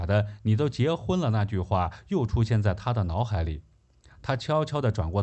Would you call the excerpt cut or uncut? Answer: uncut